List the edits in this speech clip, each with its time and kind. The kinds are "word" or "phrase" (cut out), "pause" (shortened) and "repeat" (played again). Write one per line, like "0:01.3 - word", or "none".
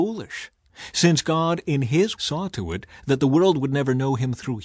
0:02.2 - word

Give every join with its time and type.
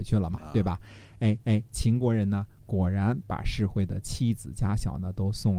0:01.4 - repeat

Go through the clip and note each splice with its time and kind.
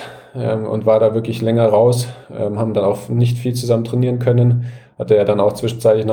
none

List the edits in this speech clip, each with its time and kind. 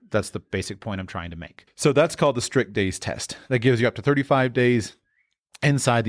0:01.7 - pause

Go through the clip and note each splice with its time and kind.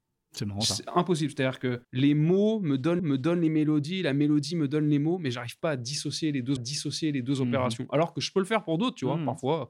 0:01.8 - pause
0:03.0 - repeat
0:06.6 - repeat

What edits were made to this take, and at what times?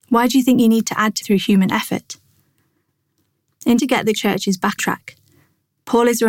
0:01.2 - word
0:03.8 - word
0:04.2 - word
0:04.8 - word

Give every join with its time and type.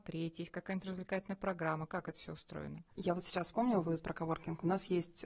0:04.0 - word

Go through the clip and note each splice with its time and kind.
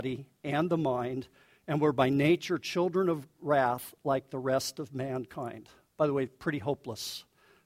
none

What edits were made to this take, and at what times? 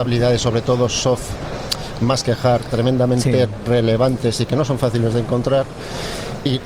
none

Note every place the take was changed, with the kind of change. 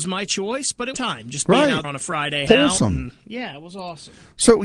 0:00.9 - phrase
0:01.8 - word
0:02.5 - word

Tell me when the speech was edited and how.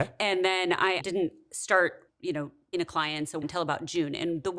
0:01.0 - word
0:02.1 - word
0:02.7 - word
0:03.4 - word

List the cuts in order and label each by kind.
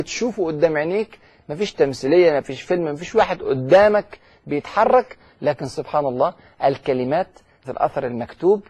0:07.6 - word

